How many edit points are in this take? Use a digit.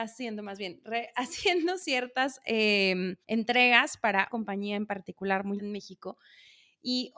3